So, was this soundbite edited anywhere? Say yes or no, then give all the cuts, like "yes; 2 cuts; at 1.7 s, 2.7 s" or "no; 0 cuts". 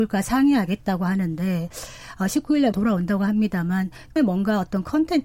yes; 2 cuts; at 2.7 s, 4.2 s